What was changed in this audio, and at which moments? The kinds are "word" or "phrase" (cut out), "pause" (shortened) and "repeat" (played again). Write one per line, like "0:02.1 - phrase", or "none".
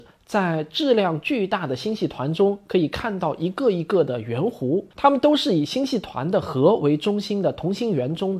0:04.9 - pause